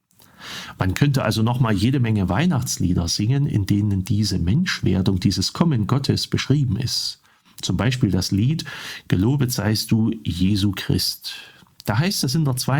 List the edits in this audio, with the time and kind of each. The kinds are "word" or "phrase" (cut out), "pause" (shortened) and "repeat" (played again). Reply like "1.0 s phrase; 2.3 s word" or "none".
none